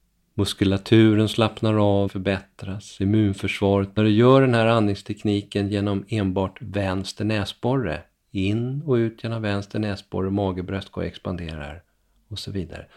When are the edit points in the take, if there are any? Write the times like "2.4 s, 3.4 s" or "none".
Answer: 2.1 s, 4.0 s